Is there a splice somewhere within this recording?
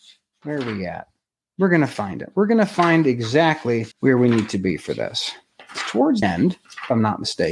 yes; 3 cuts; at 1.3 s, 3.9 s, 6.2 s

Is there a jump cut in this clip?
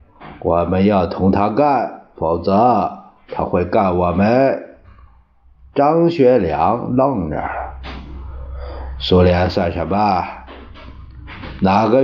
no; 0 cuts

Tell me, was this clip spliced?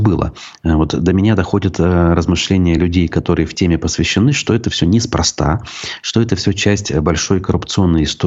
no; 0 cuts

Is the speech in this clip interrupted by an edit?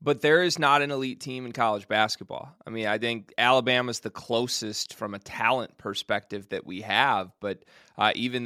no; 0 cuts

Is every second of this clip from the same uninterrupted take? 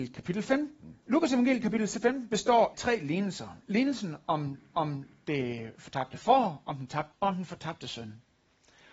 no; 4 cuts; at 1.0 s, 2.7 s, 4.7 s, 7.1 s

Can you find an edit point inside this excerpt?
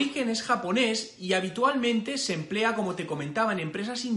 no; 0 cuts

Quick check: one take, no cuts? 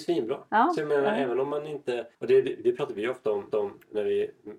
no; 2 cuts; at 2.1 s, 3.5 s

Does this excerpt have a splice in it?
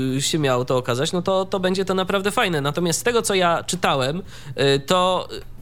no; 0 cuts

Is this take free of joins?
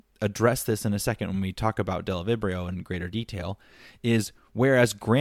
yes; 0 cuts

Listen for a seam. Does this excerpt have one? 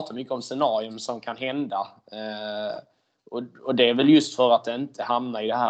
no; 0 cuts

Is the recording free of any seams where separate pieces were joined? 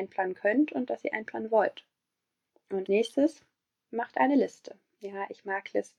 no; 1 cut; at 2.9 s

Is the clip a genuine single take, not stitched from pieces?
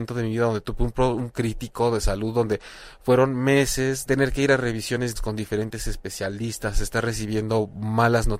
no; 3 cuts; at 1.3 s, 4.0 s, 5.1 s

